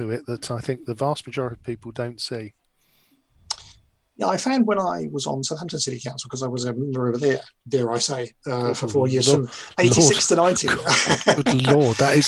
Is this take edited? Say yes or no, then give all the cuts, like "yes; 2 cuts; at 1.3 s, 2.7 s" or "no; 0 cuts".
no; 0 cuts